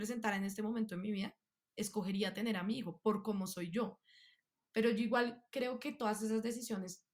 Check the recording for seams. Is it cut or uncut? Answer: uncut